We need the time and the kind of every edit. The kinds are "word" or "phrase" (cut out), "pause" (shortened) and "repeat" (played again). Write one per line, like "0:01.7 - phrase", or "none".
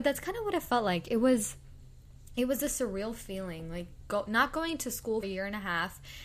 0:05.2 - word